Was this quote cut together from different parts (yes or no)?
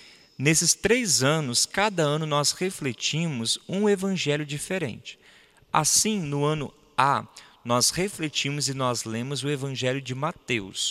no